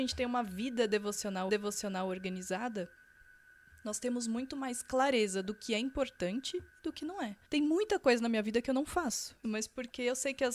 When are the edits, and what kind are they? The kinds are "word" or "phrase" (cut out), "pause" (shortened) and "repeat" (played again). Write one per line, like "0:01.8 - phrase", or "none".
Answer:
0:01.5 - repeat
0:07.5 - pause
0:09.4 - phrase